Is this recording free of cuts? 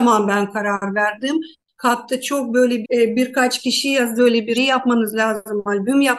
no; 3 cuts; at 2.8 s, 4.2 s, 4.5 s

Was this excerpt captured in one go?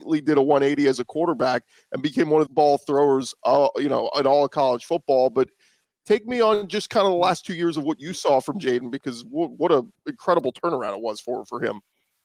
no; 1 cut; at 2.5 s

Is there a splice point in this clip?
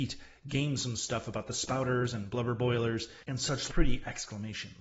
yes; 1 cut; at 3.7 s

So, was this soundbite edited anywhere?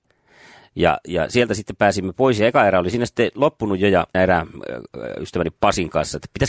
yes; 1 cut; at 4.1 s

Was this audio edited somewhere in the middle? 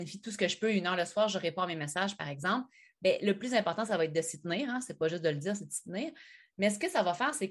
no; 0 cuts

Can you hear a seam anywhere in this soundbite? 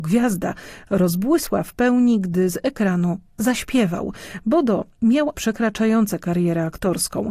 yes; 1 cut; at 5.3 s

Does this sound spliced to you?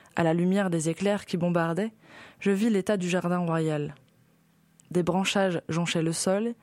no; 0 cuts

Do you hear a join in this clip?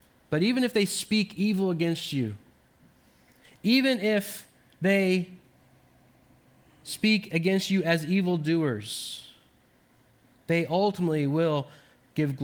no; 0 cuts

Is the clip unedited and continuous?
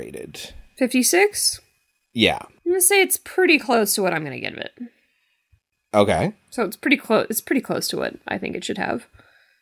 yes; 0 cuts

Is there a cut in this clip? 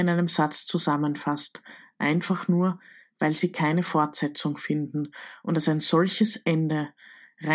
no; 0 cuts

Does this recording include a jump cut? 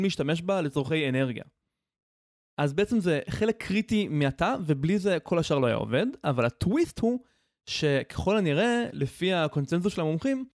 no; 0 cuts

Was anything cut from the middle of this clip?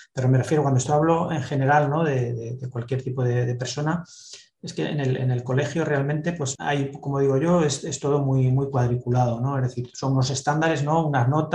no; 0 cuts

